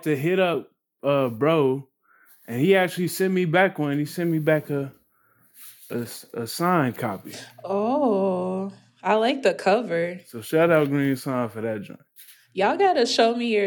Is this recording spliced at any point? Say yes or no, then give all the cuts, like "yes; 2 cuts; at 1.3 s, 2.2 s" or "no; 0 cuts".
no; 0 cuts